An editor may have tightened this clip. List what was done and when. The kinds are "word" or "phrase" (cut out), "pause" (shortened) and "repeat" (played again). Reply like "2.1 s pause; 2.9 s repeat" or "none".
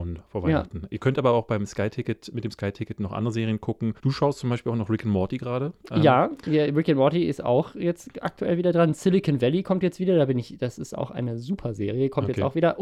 4.0 s pause